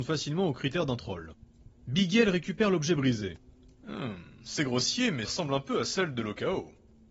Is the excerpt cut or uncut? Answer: cut